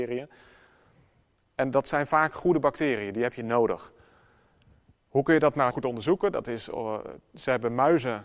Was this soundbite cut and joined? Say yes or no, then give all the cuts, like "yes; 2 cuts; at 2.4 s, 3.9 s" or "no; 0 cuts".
yes; 1 cut; at 5.7 s